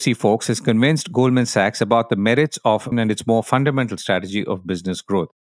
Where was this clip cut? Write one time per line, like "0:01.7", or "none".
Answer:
0:02.9